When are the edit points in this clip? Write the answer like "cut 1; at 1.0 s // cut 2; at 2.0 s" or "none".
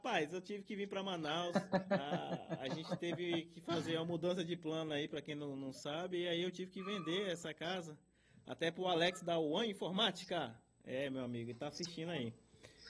none